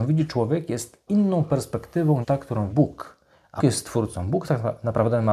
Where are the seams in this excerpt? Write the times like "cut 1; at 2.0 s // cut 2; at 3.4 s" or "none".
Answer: cut 1; at 1.1 s // cut 2; at 2.2 s // cut 3; at 2.7 s // cut 4; at 3.6 s

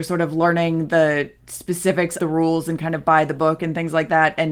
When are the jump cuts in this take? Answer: cut 1; at 2.2 s

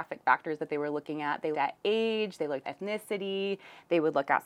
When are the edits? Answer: cut 1; at 1.5 s // cut 2; at 2.6 s

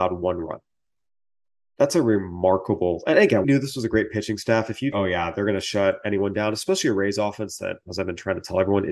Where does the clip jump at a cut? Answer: cut 1; at 3.4 s // cut 2; at 4.9 s

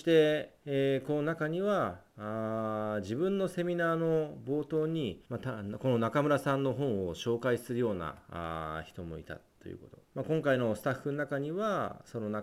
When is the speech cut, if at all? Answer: cut 1; at 5.2 s // cut 2; at 10.0 s

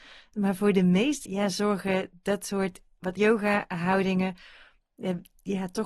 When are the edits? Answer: cut 1; at 1.2 s // cut 2; at 3.2 s

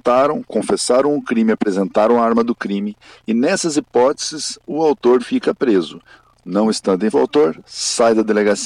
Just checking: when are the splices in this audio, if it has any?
cut 1; at 5.2 s // cut 2; at 7.1 s

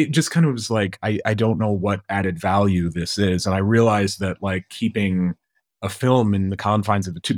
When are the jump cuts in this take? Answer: none

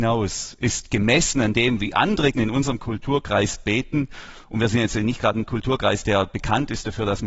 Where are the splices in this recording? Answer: cut 1; at 2.3 s

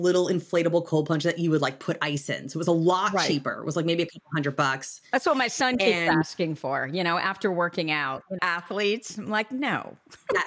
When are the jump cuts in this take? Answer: cut 1; at 8.4 s

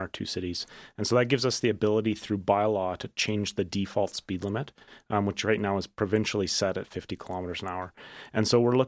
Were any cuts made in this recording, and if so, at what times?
none

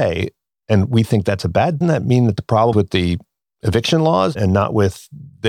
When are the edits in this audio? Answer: cut 1; at 1.8 s // cut 2; at 2.7 s

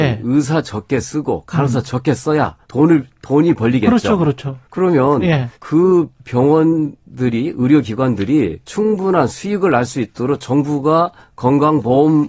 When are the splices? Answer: cut 1; at 2.6 s // cut 2; at 4.6 s // cut 3; at 5.5 s // cut 4; at 8.6 s

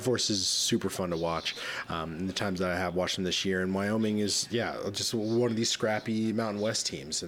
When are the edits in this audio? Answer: none

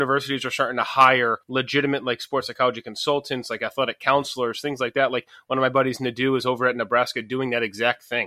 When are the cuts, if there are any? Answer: cut 1; at 1.4 s

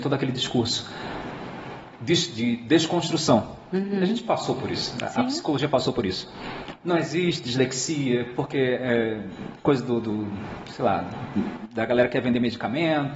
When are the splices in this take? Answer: none

